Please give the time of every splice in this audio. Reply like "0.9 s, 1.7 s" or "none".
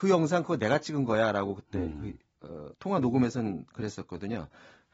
2.7 s